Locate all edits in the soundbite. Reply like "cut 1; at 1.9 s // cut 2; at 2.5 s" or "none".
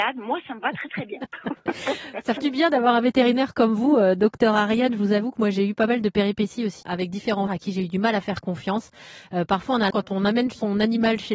cut 1; at 2.4 s // cut 2; at 6.8 s // cut 3; at 7.5 s // cut 4; at 9.9 s